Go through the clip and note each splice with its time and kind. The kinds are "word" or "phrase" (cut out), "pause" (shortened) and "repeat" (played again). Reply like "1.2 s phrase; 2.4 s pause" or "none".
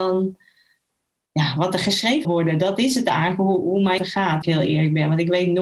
2.2 s word; 3.6 s word; 4.0 s word; 4.4 s phrase